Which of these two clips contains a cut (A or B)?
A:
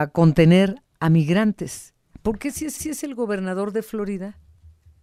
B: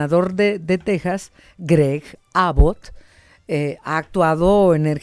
A